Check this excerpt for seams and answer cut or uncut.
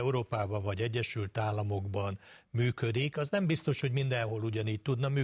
uncut